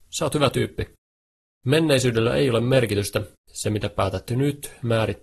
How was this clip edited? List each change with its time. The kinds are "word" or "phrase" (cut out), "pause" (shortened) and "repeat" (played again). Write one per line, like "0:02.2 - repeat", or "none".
none